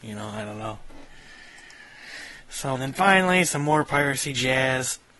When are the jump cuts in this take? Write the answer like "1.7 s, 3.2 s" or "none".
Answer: 2.8 s

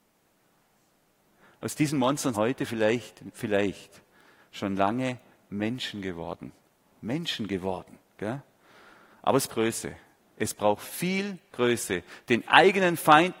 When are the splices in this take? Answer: 2.3 s, 9.5 s

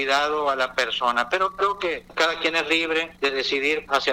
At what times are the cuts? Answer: 3.2 s

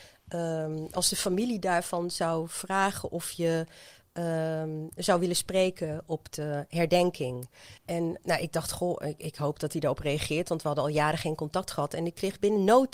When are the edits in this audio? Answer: 7.8 s

